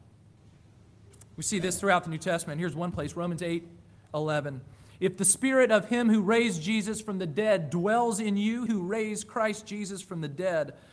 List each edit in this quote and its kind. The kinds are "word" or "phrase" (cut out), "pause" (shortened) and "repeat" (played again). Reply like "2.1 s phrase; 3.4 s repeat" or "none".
8.7 s word